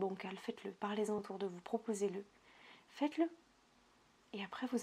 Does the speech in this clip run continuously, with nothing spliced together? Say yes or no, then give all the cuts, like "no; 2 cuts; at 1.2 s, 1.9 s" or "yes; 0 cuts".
yes; 0 cuts